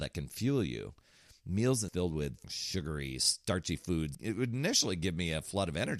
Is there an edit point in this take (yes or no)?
yes